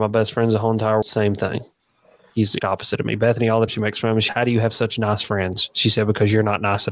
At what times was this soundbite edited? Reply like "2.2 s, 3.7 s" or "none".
1.0 s, 2.6 s, 3.7 s, 4.3 s

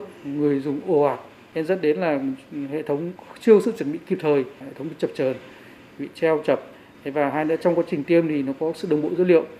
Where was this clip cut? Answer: none

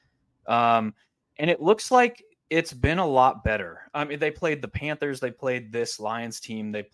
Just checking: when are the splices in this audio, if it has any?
none

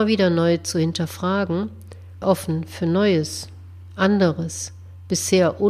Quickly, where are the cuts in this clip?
2.2 s

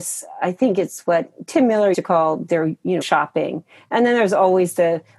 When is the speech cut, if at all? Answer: 1.9 s, 3.0 s

